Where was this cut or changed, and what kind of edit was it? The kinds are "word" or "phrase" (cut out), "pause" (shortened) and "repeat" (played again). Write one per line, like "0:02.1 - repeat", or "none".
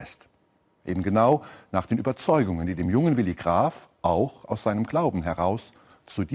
none

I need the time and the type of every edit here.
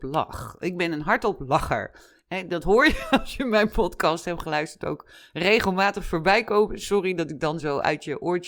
none

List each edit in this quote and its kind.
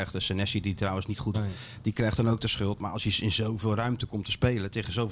0:01.3 - word

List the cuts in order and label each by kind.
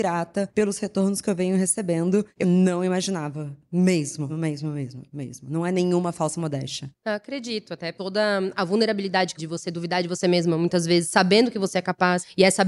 0:02.4 - word
0:04.3 - word
0:09.4 - phrase

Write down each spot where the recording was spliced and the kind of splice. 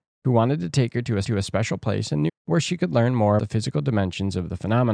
0:01.2 - repeat
0:02.3 - word
0:03.4 - word

